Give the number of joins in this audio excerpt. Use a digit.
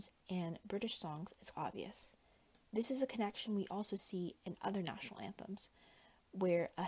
1